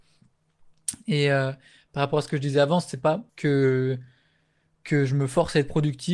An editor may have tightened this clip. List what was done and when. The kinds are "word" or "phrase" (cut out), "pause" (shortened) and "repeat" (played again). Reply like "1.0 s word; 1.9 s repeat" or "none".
3.3 s pause